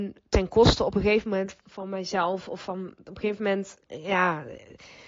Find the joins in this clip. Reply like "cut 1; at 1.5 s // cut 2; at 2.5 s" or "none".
cut 1; at 1.6 s // cut 2; at 3.8 s